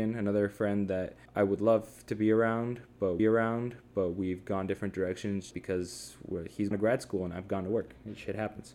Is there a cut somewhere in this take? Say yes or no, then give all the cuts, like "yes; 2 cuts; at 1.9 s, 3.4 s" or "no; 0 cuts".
yes; 4 cuts; at 1.3 s, 3.2 s, 5.5 s, 6.7 s